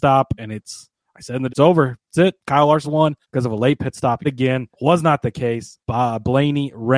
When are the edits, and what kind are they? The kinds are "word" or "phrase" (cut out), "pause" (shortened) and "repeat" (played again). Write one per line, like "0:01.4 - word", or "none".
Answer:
0:01.5 - word
0:02.8 - word
0:03.2 - pause
0:04.2 - word
0:04.7 - pause
0:05.8 - pause